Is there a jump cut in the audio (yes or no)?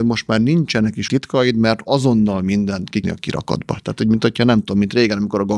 yes